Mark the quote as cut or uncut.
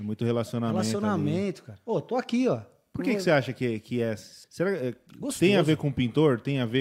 cut